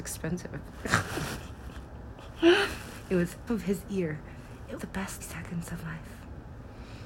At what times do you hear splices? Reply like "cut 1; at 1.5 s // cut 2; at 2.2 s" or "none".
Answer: cut 1; at 3.5 s // cut 2; at 4.8 s // cut 3; at 5.2 s // cut 4; at 5.8 s